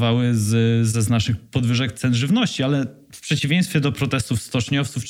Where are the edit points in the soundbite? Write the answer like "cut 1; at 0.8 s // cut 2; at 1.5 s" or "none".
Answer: none